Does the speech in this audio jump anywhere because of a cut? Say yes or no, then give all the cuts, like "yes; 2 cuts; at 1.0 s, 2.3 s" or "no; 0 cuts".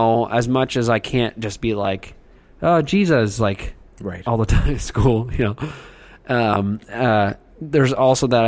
no; 0 cuts